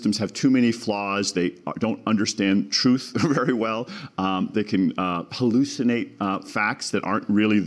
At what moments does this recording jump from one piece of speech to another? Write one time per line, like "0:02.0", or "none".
none